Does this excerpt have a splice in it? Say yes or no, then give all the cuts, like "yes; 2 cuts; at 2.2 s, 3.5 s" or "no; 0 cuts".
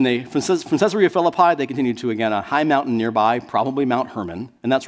no; 0 cuts